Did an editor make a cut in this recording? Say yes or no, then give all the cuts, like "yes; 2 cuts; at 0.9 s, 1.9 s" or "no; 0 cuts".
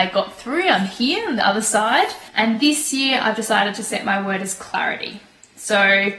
yes; 1 cut; at 2.3 s